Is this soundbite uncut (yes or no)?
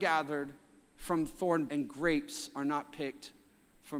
no